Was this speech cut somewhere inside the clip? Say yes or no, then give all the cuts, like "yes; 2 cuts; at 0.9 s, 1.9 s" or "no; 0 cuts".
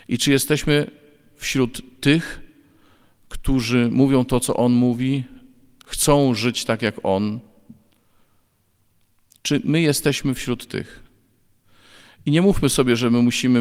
no; 0 cuts